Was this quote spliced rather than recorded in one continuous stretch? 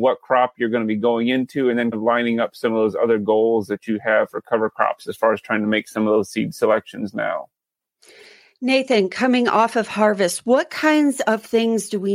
yes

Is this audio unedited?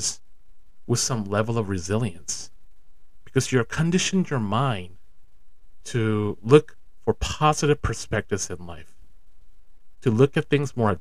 yes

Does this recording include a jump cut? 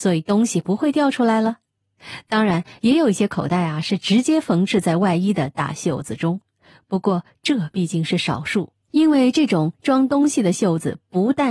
no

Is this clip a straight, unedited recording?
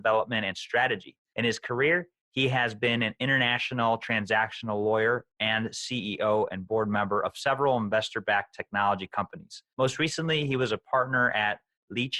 yes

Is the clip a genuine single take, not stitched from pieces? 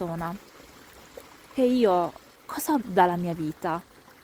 no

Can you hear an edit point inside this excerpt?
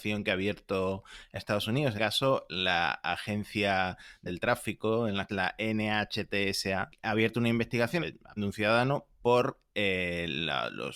yes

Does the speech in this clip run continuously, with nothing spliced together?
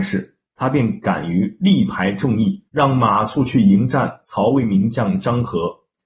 no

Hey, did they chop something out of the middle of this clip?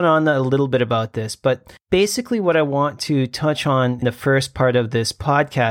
yes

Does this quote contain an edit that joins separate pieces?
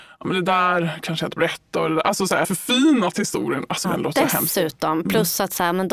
yes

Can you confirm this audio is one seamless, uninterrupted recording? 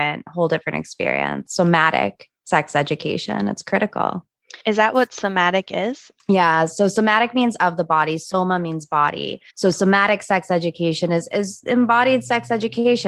no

